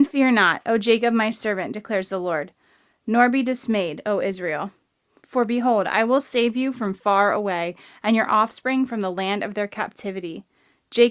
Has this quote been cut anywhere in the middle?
no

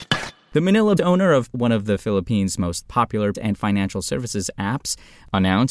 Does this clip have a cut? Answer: yes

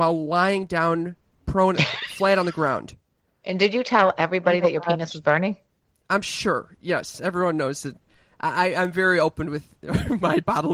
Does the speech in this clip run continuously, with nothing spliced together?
yes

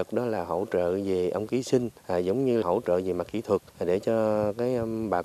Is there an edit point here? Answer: yes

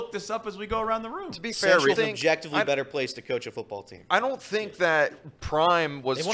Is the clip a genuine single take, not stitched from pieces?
no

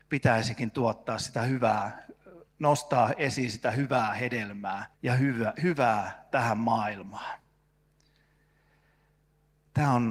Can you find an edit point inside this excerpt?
yes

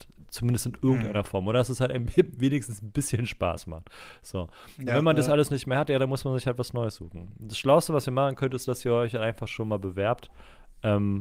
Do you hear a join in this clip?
no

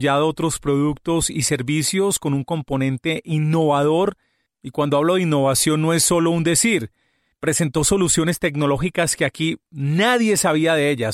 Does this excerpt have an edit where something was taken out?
no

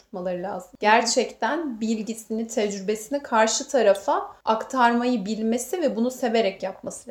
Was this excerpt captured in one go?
yes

